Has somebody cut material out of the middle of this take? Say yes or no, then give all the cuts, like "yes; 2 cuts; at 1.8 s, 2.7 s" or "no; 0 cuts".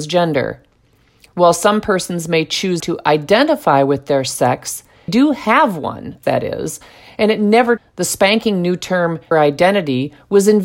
yes; 5 cuts; at 2.8 s, 5.1 s, 6.2 s, 7.8 s, 9.3 s